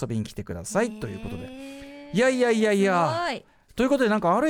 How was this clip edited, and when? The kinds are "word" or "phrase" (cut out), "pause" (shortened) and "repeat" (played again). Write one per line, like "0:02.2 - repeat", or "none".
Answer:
none

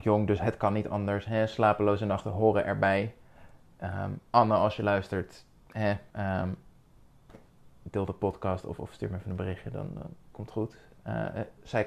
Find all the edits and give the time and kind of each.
0:04.3 - pause
0:06.1 - pause

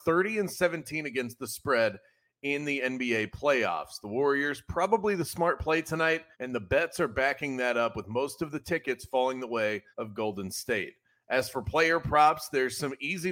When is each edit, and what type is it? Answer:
0:06.3 - pause
0:09.9 - pause

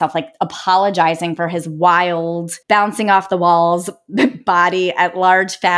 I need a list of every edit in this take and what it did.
0:02.6 - pause

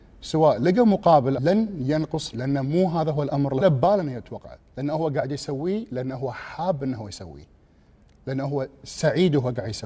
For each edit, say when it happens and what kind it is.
0:01.4 - phrase
0:02.3 - phrase
0:03.6 - phrase

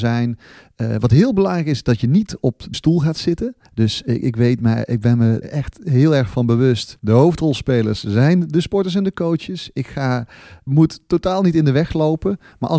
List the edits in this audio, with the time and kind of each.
0:02.7 - word
0:03.6 - pause
0:05.4 - word
0:07.0 - pause
0:10.7 - word

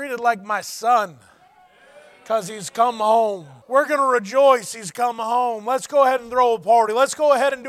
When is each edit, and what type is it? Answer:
0:03.6 - pause

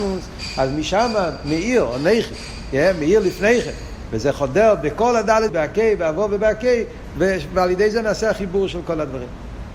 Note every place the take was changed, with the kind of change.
0:05.5 - phrase

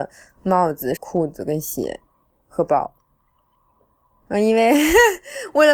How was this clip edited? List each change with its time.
0:01.0 - phrase
0:02.2 - pause

